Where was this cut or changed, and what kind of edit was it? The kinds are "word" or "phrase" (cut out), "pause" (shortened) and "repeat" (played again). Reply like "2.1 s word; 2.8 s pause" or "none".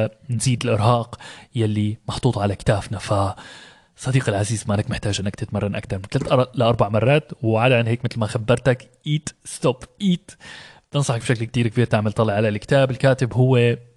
none